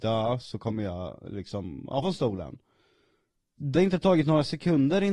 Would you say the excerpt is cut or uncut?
cut